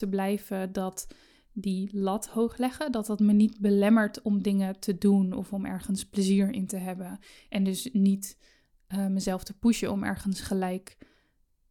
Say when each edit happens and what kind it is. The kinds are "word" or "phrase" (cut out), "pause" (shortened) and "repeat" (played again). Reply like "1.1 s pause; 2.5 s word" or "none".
none